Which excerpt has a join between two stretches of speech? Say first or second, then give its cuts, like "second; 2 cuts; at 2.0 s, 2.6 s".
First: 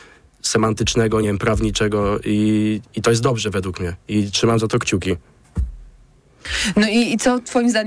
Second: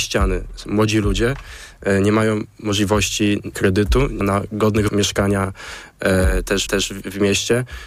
second; 4 cuts; at 3.5 s, 4.2 s, 4.9 s, 6.7 s